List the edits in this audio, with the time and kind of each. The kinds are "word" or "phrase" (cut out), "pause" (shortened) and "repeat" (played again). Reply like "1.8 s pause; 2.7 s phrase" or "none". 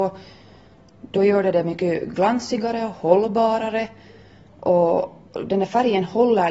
none

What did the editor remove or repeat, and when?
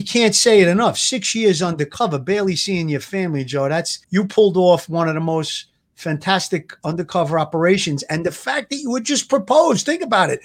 4.0 s pause

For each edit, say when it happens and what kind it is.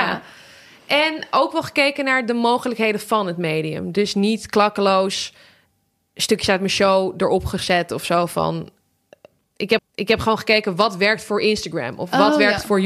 9.8 s repeat

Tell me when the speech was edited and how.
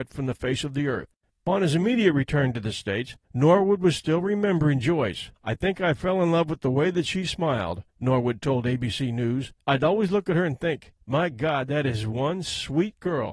1.2 s pause; 3.2 s pause; 5.4 s pause; 7.9 s pause; 9.6 s pause; 11.0 s pause

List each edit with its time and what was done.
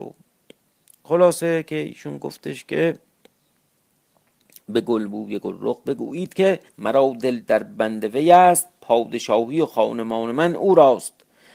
6.7 s pause

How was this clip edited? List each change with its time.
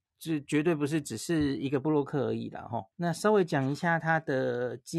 2.9 s pause

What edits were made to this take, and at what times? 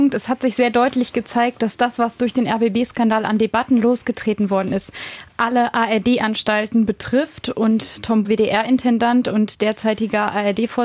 8.2 s word

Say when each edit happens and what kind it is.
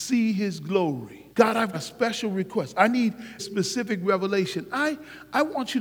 1.3 s pause; 1.7 s word; 3.4 s word

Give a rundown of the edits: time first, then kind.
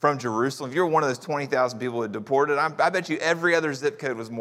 none

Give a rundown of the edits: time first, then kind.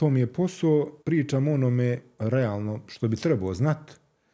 1.0 s pause

